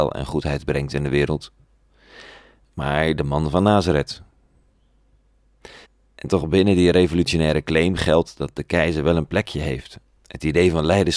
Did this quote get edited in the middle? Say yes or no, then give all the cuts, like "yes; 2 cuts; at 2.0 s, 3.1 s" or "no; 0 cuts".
yes; 1 cut; at 5.8 s